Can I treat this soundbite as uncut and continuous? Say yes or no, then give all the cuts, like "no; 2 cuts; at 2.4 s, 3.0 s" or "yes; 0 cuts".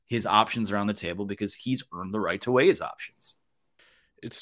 yes; 0 cuts